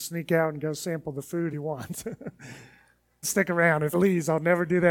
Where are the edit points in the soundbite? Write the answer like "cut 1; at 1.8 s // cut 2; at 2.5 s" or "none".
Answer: cut 1; at 1.5 s // cut 2; at 3.2 s // cut 3; at 3.9 s